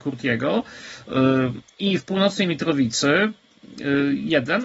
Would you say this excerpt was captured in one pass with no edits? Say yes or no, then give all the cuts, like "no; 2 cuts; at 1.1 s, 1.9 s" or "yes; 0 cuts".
no; 1 cut; at 2.0 s